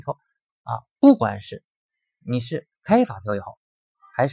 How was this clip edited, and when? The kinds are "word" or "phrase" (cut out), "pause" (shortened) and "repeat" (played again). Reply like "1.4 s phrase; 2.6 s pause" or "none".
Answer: 2.8 s pause